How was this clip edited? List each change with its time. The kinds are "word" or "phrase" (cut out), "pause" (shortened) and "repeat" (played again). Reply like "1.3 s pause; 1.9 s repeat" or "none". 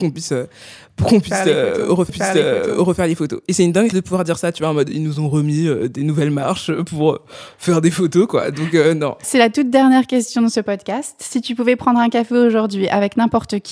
2.1 s repeat; 3.9 s word